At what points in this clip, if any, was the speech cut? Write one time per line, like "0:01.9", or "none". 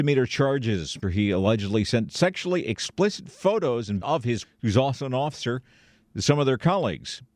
0:01.0
0:04.0
0:04.4

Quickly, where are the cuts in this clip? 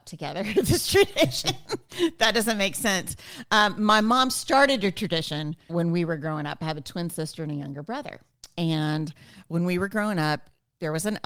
0:05.7

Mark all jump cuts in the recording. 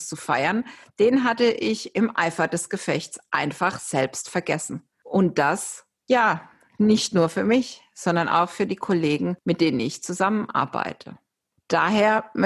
none

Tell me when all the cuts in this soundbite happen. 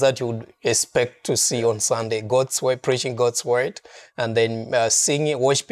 none

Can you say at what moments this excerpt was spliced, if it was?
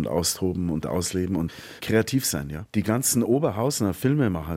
none

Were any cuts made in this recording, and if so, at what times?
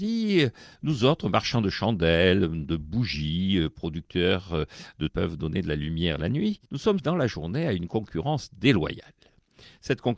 0:05.1
0:06.7
0:07.0

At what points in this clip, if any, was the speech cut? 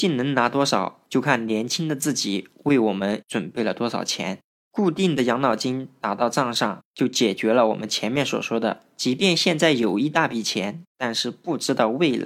0:01.1
0:10.9

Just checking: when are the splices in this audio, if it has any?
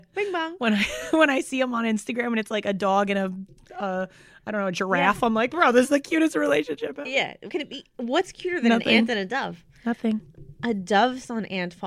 0:07.5

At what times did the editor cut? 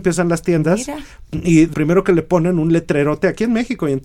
0:01.7

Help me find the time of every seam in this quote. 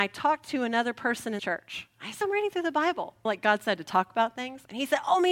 0:01.4
0:02.2
0:03.3

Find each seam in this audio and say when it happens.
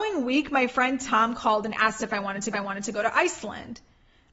0:02.5

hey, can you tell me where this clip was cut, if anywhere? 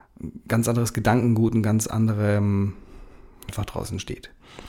0:03.5

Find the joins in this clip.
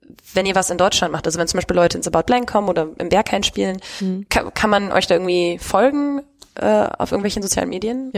none

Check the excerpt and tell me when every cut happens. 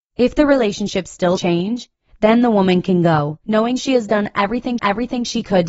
0:01.4
0:03.4
0:04.8

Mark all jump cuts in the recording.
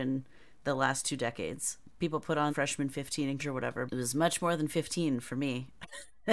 0:02.5
0:03.4
0:03.9

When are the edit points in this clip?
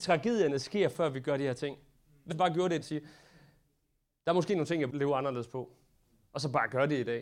0:02.3
0:02.8
0:04.9

